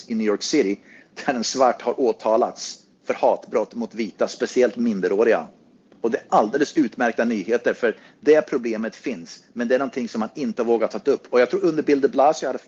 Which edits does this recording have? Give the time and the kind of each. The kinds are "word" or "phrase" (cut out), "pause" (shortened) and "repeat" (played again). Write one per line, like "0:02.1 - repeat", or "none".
none